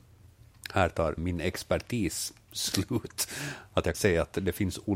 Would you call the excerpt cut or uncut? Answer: cut